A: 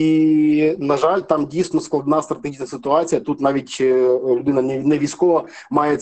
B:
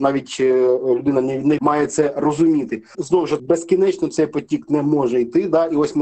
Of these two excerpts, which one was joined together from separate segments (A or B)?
B